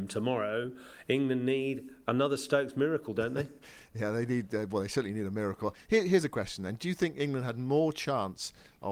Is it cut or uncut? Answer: uncut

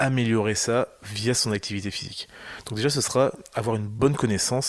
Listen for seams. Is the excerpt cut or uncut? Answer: uncut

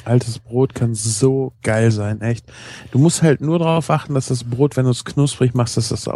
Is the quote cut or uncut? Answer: cut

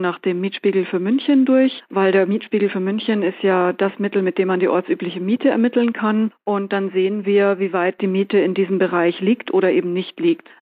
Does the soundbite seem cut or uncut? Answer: uncut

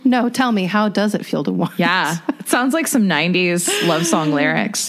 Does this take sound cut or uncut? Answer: uncut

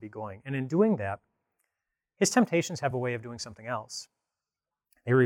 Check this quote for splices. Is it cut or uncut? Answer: uncut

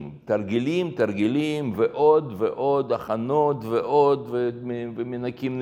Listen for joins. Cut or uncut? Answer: uncut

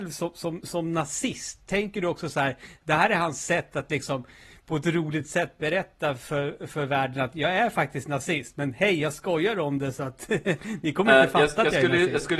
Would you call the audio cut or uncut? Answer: uncut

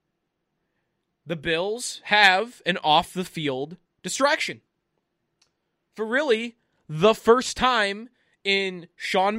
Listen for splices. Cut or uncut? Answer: uncut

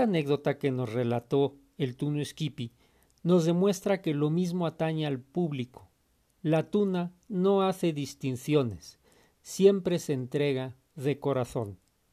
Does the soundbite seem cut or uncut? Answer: uncut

